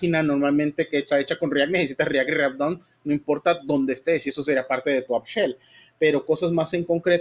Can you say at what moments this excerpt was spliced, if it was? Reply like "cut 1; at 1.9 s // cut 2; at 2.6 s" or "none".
none